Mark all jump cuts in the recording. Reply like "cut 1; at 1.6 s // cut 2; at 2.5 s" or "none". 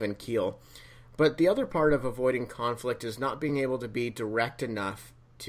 none